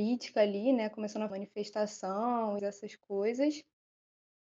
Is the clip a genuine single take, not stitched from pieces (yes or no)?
no